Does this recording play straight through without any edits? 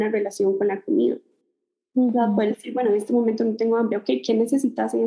yes; 0 cuts

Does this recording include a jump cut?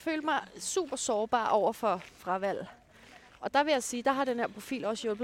yes; 2 cuts; at 2.2 s, 3.3 s

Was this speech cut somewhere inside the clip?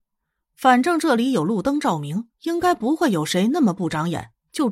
yes; 1 cut; at 2.3 s

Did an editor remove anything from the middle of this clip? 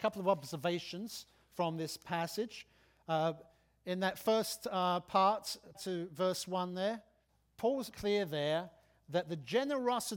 yes; 2 cuts; at 5.7 s, 7.9 s

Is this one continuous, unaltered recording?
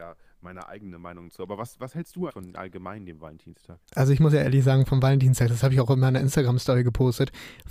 no; 2 cuts; at 2.3 s, 3.9 s

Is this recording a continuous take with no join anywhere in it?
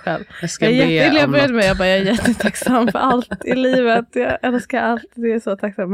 yes; 0 cuts

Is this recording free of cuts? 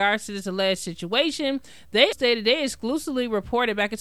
no; 1 cut; at 2.1 s

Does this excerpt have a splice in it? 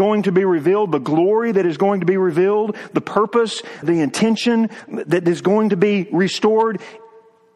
yes; 1 cut; at 3.8 s

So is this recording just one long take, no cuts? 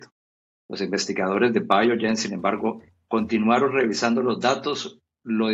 yes; 0 cuts

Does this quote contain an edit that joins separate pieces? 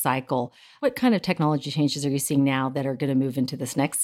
no; 0 cuts

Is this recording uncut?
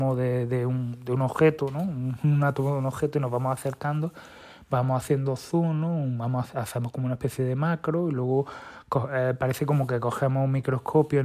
yes; 0 cuts

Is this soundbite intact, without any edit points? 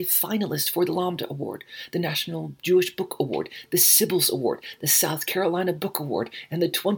yes; 0 cuts

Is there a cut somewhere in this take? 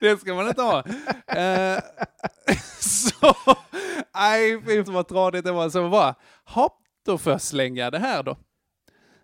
yes; 1 cut; at 4.9 s

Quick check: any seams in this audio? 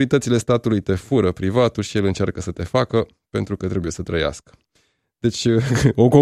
no; 0 cuts

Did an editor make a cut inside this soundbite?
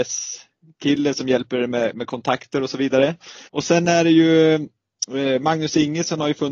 yes; 1 cut; at 3.5 s

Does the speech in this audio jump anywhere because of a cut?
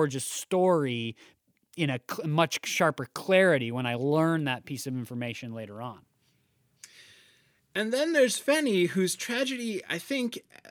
no; 0 cuts

